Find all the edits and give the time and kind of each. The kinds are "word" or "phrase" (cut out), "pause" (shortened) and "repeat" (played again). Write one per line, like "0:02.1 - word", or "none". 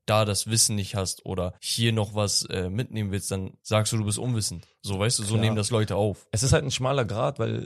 0:01.6 - pause
0:03.6 - pause